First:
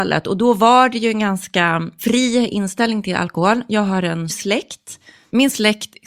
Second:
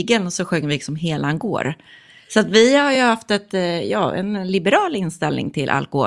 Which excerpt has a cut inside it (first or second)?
first